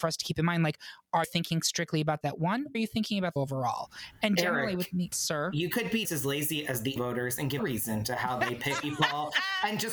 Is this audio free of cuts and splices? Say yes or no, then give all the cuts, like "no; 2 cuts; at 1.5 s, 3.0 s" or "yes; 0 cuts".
no; 9 cuts; at 1.2 s, 2.2 s, 2.7 s, 3.4 s, 5.1 s, 6.0 s, 7.0 s, 7.6 s, 8.8 s